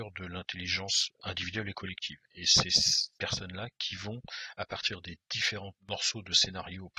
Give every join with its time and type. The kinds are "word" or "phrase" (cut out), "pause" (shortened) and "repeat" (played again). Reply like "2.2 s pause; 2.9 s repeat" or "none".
3.1 s pause; 5.8 s pause